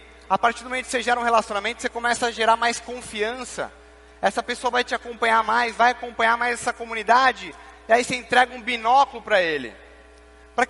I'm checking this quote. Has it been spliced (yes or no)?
no